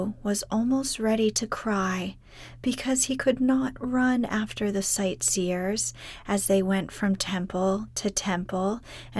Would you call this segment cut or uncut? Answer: uncut